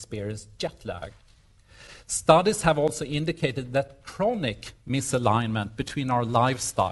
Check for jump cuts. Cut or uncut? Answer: uncut